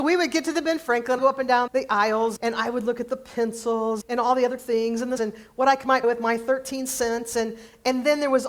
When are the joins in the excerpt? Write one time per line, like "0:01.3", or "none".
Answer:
0:01.2
0:01.7
0:02.4
0:04.0
0:04.6
0:05.2
0:06.0